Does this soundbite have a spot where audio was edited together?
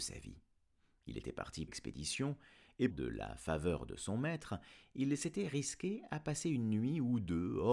yes; 2 cuts; at 1.7 s, 2.9 s

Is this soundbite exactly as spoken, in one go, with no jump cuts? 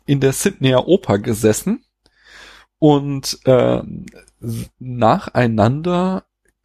yes; 0 cuts

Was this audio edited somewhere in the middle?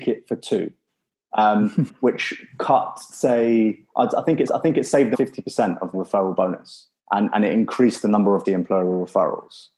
yes; 7 cuts; at 1.9 s, 3.1 s, 4.5 s, 5.1 s, 5.9 s, 7.0 s, 8.4 s

